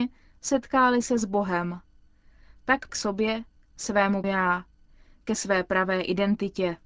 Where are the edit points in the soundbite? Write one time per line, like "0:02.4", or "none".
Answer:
0:02.9
0:04.2